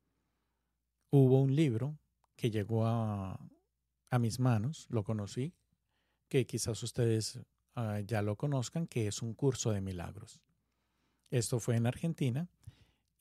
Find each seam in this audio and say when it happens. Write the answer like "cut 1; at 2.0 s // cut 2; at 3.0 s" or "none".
none